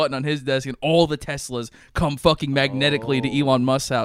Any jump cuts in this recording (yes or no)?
no